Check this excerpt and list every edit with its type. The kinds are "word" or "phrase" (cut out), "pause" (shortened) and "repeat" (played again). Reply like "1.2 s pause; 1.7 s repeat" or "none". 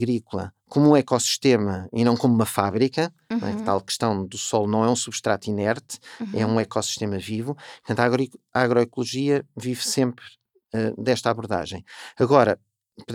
none